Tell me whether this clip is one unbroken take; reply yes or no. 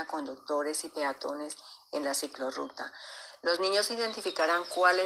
yes